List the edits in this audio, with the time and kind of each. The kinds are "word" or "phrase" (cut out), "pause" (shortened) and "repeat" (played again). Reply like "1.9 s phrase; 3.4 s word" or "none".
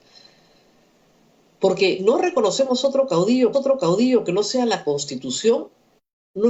2.0 s word; 3.5 s repeat